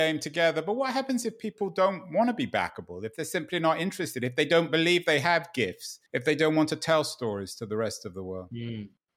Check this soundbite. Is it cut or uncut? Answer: cut